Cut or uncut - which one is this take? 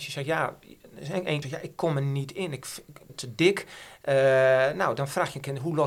cut